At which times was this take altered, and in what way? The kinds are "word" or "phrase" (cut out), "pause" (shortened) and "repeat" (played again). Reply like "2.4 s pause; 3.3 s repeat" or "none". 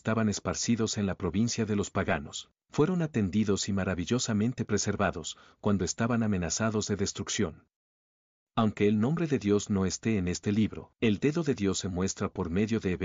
10.9 s pause